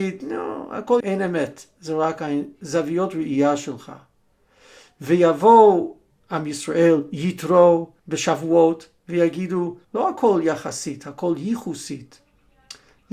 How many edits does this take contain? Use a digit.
4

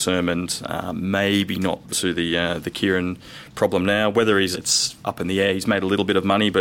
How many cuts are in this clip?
2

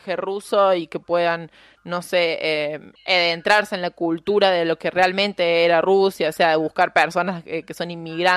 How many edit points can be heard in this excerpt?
1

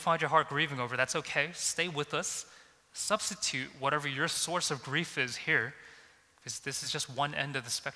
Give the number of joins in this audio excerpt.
0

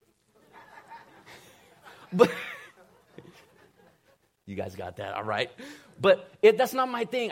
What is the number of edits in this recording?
0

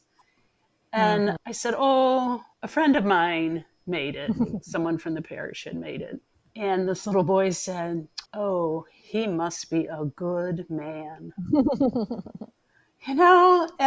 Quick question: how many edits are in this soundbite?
3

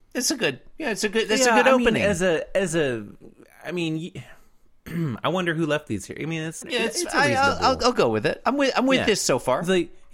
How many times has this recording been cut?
1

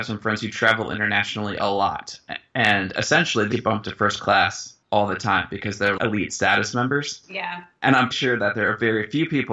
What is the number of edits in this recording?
5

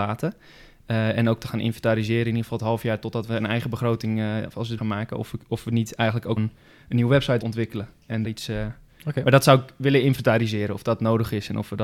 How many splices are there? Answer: 4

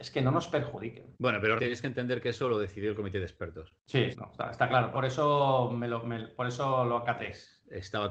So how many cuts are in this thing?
4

